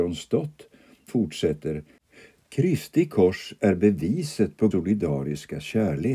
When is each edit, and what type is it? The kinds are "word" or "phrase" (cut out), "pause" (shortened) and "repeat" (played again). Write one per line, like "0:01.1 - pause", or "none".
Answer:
0:01.1 - word
0:04.7 - word